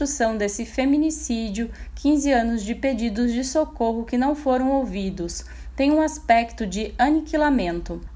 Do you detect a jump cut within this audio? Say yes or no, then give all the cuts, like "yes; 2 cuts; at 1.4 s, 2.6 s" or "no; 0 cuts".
no; 0 cuts